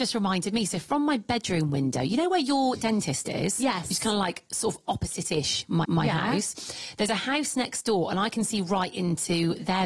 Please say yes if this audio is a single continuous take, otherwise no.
no